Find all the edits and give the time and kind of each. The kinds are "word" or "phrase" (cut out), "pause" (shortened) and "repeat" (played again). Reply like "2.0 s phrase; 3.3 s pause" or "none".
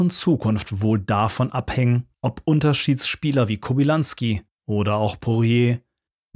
2.1 s pause; 4.5 s pause